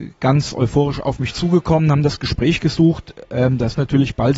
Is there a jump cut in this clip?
no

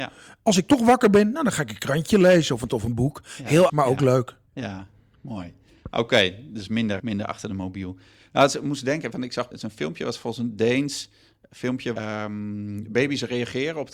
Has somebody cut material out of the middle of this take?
yes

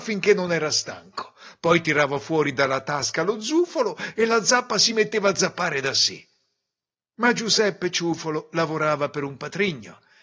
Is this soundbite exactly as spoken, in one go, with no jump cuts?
yes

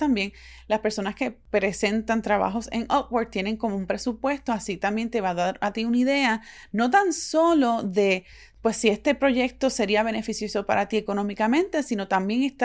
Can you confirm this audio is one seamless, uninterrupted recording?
yes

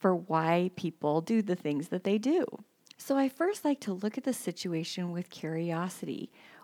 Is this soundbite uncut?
yes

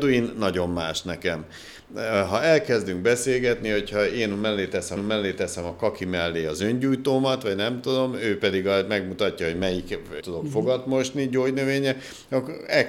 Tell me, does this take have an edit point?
yes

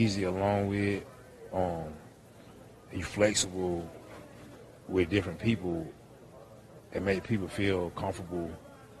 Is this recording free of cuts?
yes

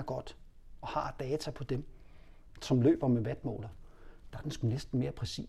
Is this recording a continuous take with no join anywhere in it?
yes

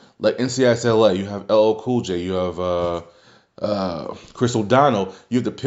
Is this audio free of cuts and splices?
yes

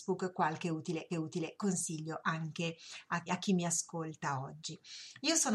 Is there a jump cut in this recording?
yes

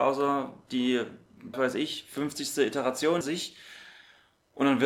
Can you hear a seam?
yes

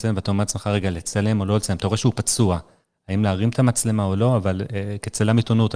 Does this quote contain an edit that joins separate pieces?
no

